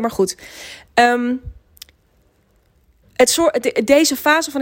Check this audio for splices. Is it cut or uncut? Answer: uncut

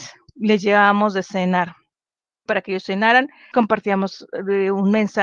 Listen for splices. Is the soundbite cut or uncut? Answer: cut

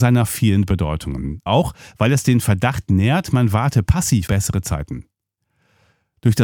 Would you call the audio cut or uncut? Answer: cut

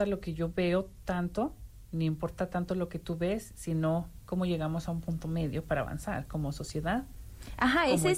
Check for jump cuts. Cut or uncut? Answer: uncut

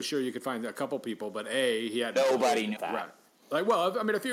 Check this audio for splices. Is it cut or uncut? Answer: cut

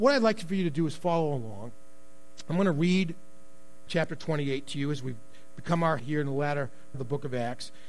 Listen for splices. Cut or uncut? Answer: cut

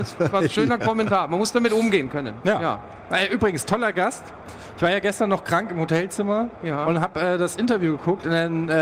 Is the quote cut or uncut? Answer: uncut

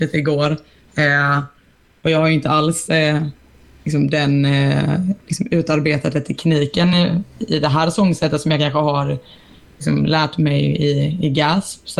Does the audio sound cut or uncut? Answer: uncut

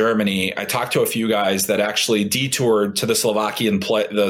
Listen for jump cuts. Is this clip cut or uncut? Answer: uncut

